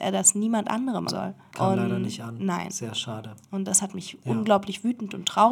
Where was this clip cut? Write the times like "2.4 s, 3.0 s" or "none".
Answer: 1.1 s